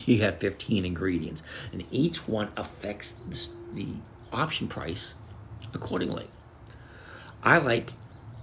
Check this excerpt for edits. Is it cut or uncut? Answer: uncut